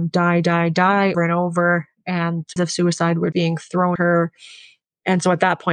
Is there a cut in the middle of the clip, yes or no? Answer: yes